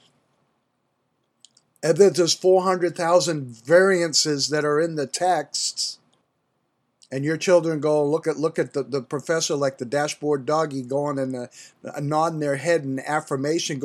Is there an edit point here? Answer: yes; 2 cuts; at 6.2 s, 8.2 s

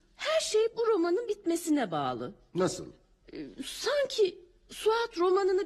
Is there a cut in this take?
no; 0 cuts

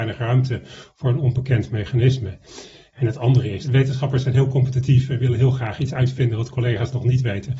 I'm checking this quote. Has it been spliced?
no; 0 cuts

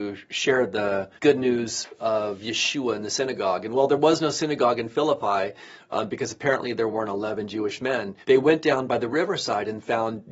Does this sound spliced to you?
yes; 2 cuts; at 1.2 s, 8.2 s

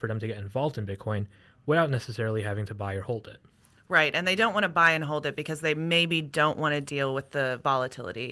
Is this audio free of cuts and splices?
yes; 0 cuts

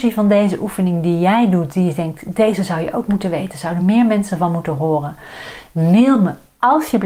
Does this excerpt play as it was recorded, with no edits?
yes; 0 cuts

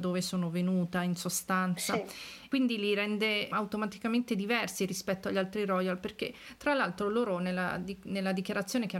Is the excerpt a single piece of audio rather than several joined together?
yes; 0 cuts

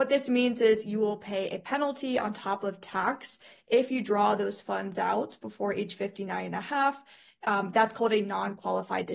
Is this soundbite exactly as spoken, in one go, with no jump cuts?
yes; 0 cuts

